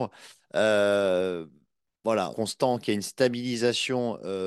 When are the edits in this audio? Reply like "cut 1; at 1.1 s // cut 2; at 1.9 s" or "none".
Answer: cut 1; at 2.3 s